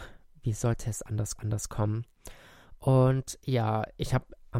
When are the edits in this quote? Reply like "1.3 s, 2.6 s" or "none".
1.4 s